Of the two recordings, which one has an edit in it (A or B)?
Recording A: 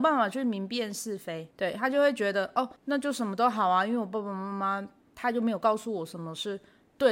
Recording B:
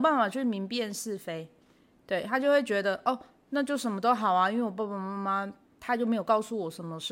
A